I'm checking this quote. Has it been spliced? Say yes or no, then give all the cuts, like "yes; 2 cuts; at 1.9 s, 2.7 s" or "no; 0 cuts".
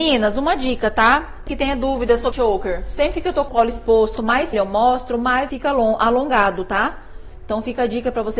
yes; 6 cuts; at 1.5 s, 2.3 s, 3.5 s, 4.2 s, 4.5 s, 5.5 s